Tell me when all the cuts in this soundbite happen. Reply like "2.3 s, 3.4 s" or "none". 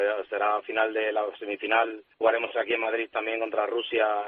2.1 s